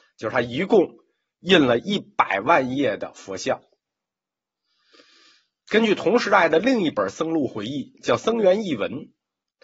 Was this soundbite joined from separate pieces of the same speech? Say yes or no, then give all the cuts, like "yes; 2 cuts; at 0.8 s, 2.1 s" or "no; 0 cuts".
no; 0 cuts